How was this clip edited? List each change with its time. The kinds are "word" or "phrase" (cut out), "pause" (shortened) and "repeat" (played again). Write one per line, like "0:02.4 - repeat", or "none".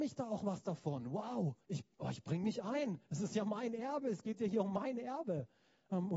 0:01.6 - pause